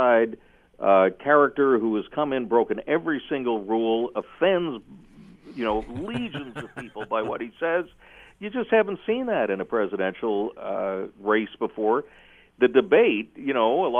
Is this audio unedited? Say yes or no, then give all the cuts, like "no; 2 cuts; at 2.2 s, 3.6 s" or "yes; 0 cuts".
yes; 0 cuts